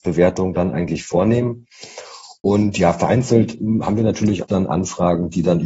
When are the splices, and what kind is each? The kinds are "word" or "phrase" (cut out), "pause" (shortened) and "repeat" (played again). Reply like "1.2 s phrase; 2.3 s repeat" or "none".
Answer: 4.4 s word